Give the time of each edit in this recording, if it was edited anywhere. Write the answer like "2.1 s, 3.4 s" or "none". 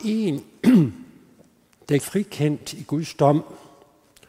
2.0 s